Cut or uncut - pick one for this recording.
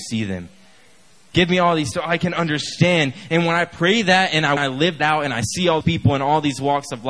cut